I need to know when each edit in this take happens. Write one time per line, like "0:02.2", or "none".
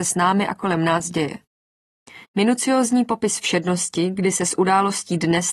0:02.2